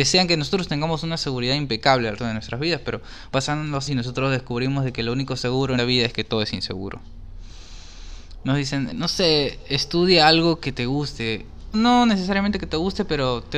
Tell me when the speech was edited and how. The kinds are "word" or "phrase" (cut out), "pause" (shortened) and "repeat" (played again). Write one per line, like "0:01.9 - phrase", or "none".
0:02.2 - word
0:03.3 - word
0:03.9 - word
0:05.8 - word
0:08.9 - word
0:11.7 - word